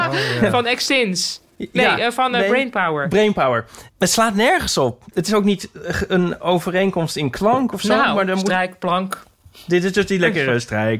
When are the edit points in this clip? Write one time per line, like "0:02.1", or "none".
0:03.9